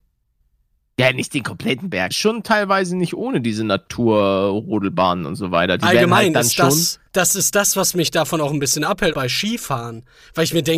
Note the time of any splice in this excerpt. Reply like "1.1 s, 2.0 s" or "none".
2.1 s, 7.1 s, 9.1 s